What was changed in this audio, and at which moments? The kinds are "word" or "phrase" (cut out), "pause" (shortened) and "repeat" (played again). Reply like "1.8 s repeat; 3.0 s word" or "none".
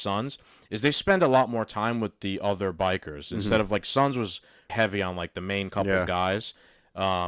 4.7 s word